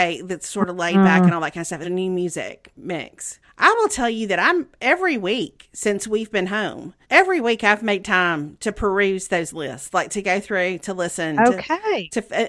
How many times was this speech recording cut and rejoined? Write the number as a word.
three